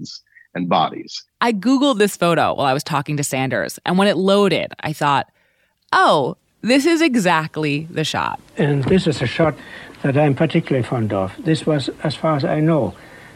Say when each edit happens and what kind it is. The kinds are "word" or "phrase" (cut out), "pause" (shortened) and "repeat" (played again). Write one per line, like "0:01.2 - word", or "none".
0:01.3 - pause